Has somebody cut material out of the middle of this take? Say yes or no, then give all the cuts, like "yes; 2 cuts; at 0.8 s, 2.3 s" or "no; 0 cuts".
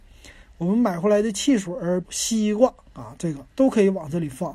yes; 2 cuts; at 2.0 s, 3.5 s